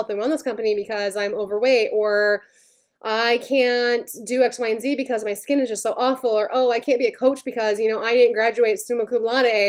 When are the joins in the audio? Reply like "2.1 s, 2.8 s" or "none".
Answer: none